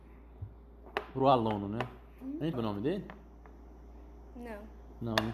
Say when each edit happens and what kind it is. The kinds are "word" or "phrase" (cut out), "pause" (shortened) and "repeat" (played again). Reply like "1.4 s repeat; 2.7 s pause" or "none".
2.5 s word